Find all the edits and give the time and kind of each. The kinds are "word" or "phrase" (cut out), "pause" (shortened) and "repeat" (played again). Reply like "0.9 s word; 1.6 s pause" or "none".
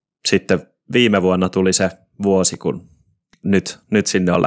none